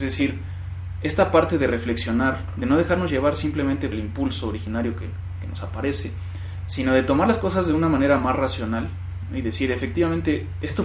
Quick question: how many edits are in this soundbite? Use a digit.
1